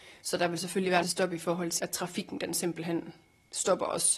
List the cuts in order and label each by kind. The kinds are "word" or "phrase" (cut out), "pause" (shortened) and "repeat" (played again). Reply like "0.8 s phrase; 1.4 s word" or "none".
1.0 s word; 1.8 s word